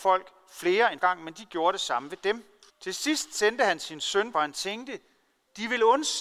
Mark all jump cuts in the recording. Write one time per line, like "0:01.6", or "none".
0:01.0
0:02.7
0:04.3